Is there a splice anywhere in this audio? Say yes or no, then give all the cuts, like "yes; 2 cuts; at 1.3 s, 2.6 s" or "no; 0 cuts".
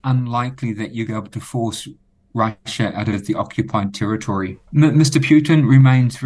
yes; 3 cuts; at 1.1 s, 3.1 s, 4.6 s